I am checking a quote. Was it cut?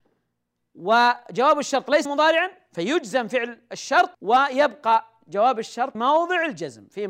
yes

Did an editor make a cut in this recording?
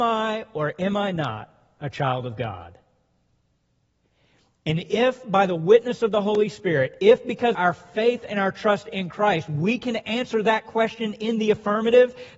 yes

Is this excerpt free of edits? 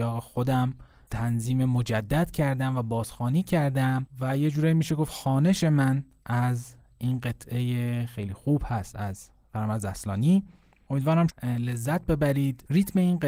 no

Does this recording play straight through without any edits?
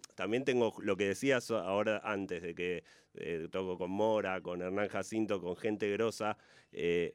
yes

